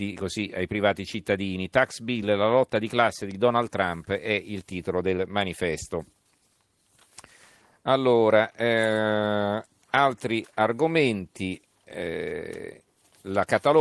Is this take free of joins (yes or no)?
yes